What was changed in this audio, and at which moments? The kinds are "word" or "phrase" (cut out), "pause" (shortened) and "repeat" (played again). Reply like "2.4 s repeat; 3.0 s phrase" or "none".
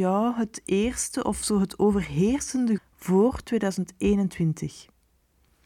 2.8 s word